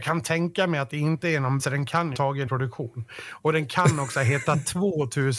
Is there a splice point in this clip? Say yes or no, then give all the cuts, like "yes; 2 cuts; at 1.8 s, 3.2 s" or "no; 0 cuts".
yes; 3 cuts; at 1.6 s, 2.1 s, 2.5 s